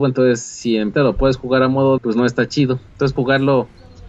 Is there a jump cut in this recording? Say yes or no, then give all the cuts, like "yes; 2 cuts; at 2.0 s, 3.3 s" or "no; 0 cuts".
yes; 3 cuts; at 0.9 s, 2.0 s, 3.2 s